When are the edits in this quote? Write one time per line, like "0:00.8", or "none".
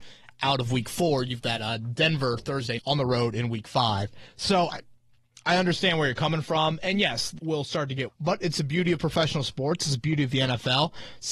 0:01.4
0:02.8
0:04.7
0:07.4
0:08.1